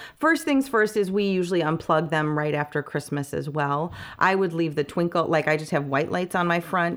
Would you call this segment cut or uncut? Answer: uncut